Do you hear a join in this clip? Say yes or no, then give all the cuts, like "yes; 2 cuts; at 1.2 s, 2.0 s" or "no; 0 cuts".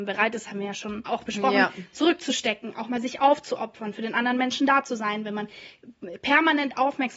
yes; 1 cut; at 1.1 s